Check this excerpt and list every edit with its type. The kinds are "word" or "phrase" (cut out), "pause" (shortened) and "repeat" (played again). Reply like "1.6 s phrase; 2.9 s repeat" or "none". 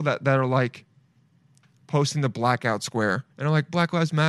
3.3 s pause

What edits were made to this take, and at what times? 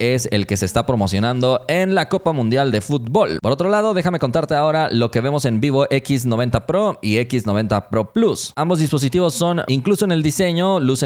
9.7 s phrase

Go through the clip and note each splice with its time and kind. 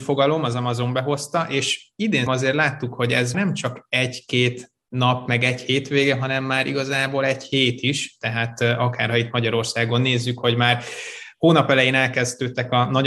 2.3 s word; 3.3 s word

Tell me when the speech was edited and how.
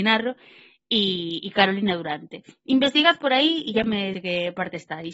4.1 s word

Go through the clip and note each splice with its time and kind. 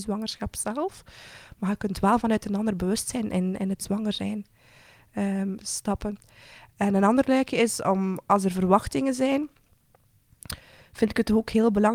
none

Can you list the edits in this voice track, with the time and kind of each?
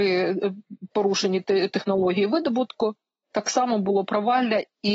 none

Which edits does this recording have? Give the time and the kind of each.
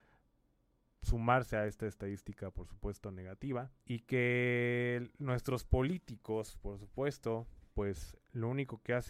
3.8 s pause

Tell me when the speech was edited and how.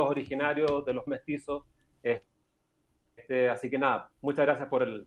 1.1 s word; 4.1 s pause

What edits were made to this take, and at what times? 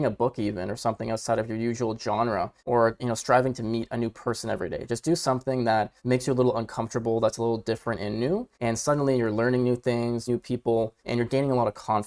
2.6 s pause; 6.0 s pause; 8.5 s pause; 10.3 s phrase; 11.0 s pause

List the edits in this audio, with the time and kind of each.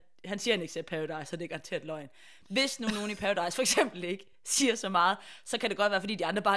none

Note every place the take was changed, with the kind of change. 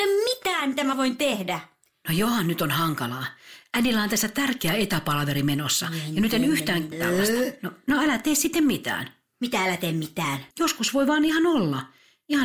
6.9 s word; 10.5 s pause

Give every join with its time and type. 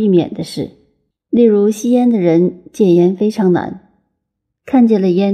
1.1 s pause

